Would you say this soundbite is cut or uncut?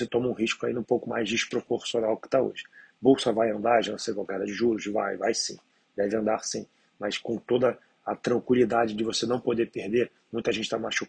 uncut